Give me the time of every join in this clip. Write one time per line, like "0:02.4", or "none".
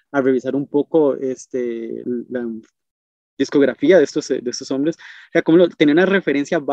0:02.0